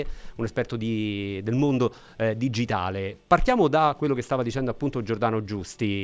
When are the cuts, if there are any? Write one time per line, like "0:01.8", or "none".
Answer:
none